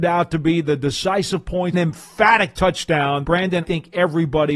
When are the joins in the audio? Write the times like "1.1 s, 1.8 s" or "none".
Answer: 1.7 s, 3.2 s, 3.6 s